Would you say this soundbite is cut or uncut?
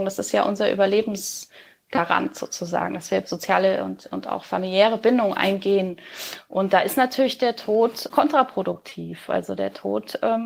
uncut